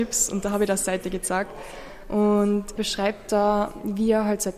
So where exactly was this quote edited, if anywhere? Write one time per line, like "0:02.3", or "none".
0:02.7